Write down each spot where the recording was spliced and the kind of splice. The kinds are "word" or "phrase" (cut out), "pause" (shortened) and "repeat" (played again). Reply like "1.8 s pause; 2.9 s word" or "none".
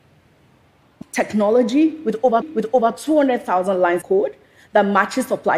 1.0 s word; 2.4 s repeat; 4.0 s word